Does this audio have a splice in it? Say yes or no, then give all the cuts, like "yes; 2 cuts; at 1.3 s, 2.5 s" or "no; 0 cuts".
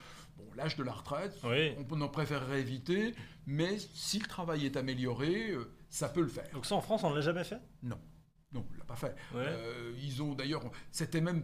no; 0 cuts